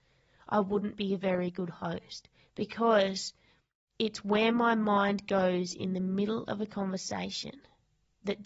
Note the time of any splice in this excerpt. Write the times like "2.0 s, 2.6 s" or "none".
none